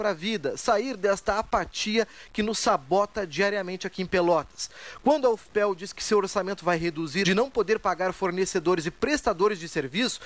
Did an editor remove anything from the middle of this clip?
yes; 1 cut; at 7.2 s

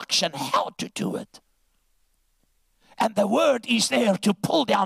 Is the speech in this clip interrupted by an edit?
no; 0 cuts

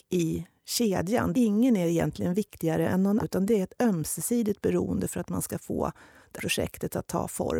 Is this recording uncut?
no; 3 cuts; at 1.3 s, 3.2 s, 6.4 s

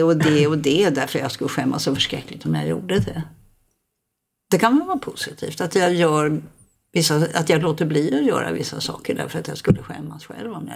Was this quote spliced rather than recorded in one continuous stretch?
no; 0 cuts

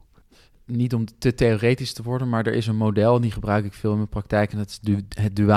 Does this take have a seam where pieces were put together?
no; 0 cuts

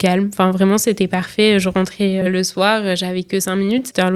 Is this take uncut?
no; 1 cut; at 2.2 s

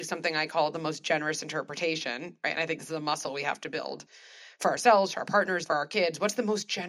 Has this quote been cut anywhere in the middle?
yes; 1 cut; at 5.7 s

